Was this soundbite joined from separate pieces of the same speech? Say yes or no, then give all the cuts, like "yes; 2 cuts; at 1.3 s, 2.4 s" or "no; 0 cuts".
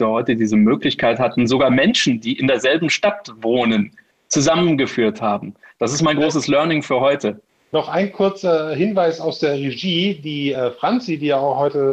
no; 0 cuts